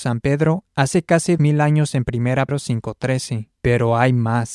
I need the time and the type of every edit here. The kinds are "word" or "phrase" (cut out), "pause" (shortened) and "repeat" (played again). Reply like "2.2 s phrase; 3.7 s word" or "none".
1.4 s word; 2.5 s word; 3.5 s pause